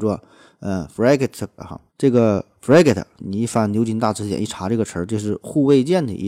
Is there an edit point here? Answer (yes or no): yes